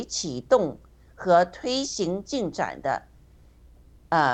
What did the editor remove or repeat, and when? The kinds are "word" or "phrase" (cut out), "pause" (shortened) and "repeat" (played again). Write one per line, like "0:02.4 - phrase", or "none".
none